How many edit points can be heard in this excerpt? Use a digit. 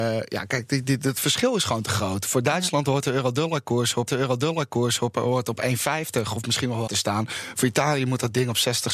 2